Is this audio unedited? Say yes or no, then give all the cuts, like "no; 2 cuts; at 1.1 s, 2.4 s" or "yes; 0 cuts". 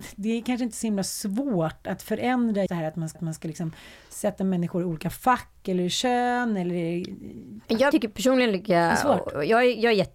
no; 3 cuts; at 2.7 s, 3.1 s, 7.9 s